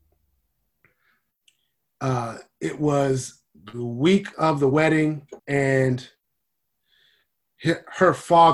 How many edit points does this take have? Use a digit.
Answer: 2